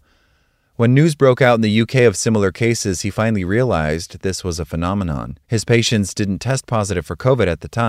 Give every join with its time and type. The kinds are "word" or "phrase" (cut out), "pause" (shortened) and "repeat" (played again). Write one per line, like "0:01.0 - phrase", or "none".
0:05.4 - pause